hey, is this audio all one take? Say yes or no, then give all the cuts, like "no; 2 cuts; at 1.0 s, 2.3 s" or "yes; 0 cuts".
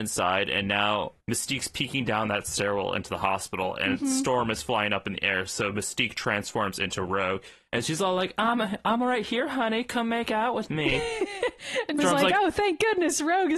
no; 2 cuts; at 1.2 s, 12.0 s